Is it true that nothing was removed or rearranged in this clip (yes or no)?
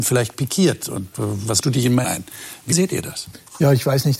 no